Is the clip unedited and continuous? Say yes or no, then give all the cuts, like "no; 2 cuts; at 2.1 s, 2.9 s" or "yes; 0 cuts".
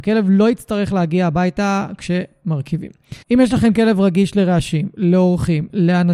no; 1 cut; at 3.2 s